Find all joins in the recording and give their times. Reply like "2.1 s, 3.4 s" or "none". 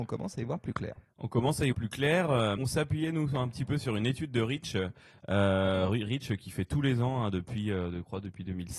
1.7 s, 2.6 s